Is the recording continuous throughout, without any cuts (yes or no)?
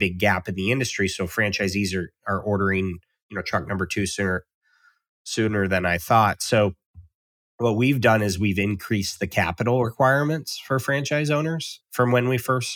yes